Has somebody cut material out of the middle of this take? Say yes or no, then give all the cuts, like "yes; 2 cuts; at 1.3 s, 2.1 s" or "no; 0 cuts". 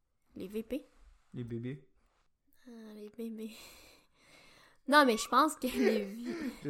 no; 0 cuts